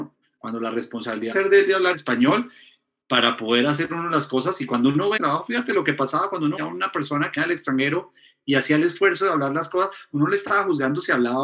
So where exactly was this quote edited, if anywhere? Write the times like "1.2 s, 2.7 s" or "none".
1.3 s, 1.9 s, 5.2 s, 6.6 s, 7.4 s